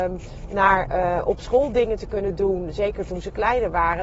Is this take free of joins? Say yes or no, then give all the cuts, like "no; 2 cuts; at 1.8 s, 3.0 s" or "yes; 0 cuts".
yes; 0 cuts